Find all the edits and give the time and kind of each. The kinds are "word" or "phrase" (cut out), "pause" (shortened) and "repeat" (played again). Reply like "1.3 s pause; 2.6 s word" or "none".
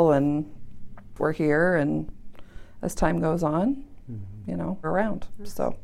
1.2 s phrase; 4.8 s word

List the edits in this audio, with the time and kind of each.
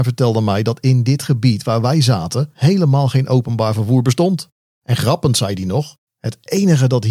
none

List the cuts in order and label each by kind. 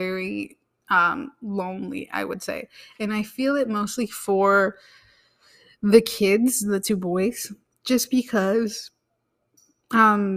none

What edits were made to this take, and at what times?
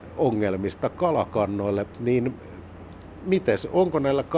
none

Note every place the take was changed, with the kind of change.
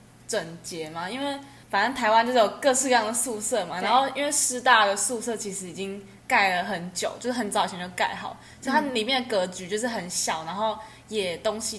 1.6 s pause

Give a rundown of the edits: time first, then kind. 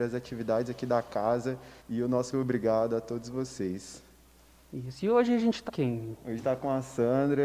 1.8 s pause; 2.3 s word; 5.7 s phrase; 6.4 s phrase

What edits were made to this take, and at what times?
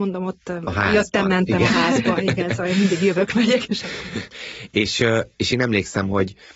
none

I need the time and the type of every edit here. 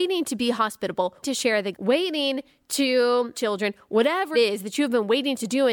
1.2 s word; 1.7 s word; 3.3 s word; 4.3 s word

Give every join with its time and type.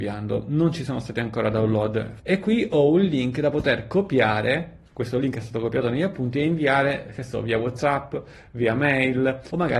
none

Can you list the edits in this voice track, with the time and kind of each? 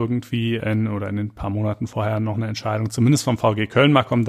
none

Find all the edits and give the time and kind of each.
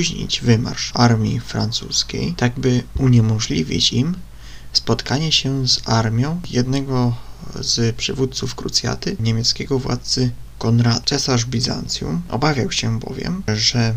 none

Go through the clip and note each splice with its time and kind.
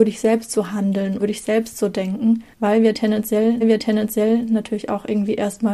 1.2 s word; 2.5 s pause; 3.6 s repeat

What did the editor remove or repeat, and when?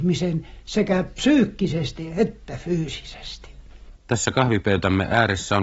4.0 s pause

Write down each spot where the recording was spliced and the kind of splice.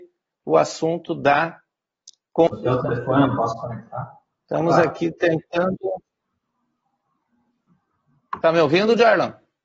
none

